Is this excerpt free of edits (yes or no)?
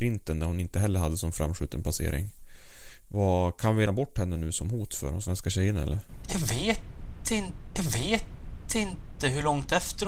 no